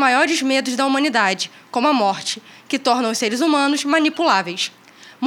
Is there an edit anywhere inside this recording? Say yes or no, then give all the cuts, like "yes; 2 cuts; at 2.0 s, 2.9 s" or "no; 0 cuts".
no; 0 cuts